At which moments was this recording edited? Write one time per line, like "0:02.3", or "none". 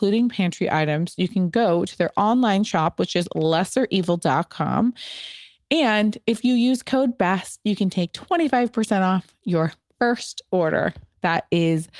none